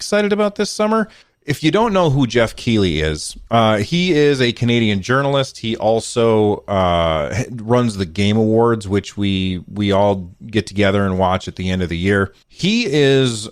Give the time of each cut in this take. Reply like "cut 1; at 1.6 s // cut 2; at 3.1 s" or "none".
cut 1; at 1.2 s // cut 2; at 3.5 s // cut 3; at 12.4 s